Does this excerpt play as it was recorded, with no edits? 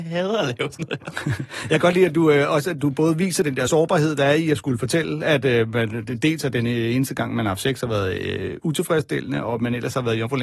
yes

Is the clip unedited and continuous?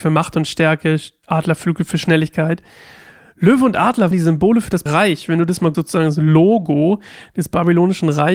no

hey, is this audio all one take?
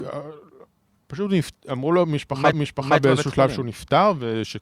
no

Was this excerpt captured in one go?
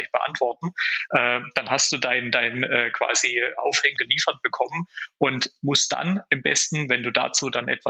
no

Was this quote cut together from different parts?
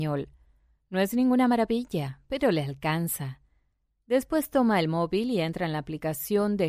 no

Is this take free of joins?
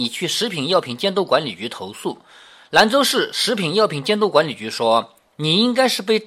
yes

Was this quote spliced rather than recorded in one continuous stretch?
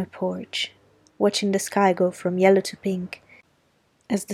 no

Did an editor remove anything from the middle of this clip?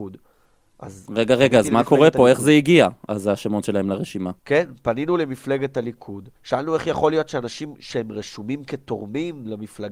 yes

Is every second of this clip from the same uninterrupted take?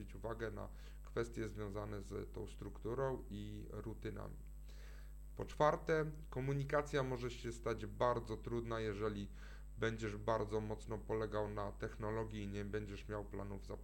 yes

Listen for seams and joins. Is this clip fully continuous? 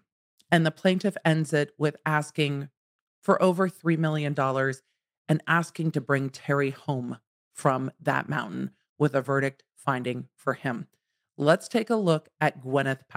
yes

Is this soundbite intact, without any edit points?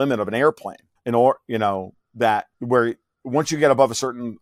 no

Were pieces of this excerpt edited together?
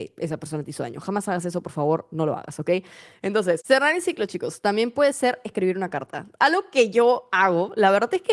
no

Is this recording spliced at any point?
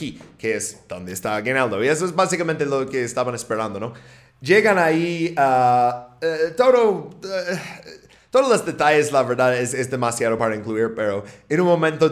no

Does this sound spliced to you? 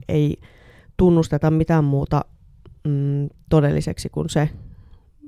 no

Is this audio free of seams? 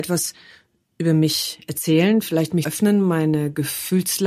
no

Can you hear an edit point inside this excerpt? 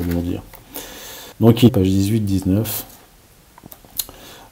yes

